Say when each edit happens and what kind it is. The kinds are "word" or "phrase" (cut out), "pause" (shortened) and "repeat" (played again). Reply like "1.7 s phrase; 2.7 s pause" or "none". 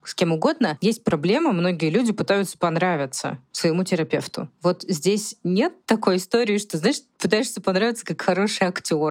5.8 s pause